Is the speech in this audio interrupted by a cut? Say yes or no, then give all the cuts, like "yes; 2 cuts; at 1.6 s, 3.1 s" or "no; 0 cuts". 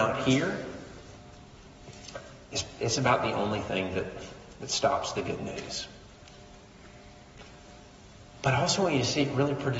no; 0 cuts